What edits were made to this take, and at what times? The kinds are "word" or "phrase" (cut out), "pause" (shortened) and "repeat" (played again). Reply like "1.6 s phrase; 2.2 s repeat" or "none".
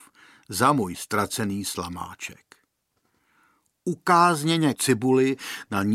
4.7 s word